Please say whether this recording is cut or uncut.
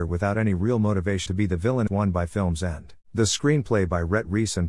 cut